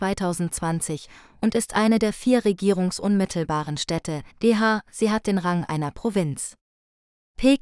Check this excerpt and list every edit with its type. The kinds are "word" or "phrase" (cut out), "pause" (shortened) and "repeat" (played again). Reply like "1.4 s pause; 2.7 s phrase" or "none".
4.3 s pause